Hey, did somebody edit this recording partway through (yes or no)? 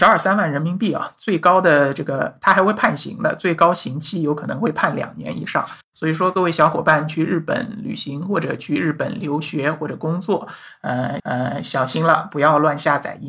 yes